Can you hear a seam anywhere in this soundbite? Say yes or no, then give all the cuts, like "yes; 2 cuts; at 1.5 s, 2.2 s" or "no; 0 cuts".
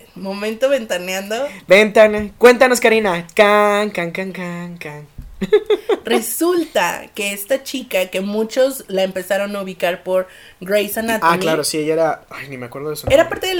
no; 0 cuts